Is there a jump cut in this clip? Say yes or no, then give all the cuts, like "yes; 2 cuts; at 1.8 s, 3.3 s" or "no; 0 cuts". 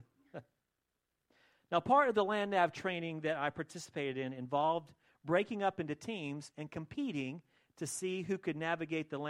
no; 0 cuts